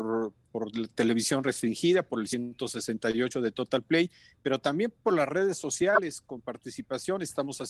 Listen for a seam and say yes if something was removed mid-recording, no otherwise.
no